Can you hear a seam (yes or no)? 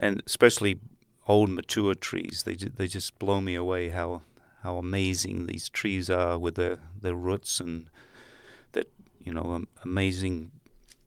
no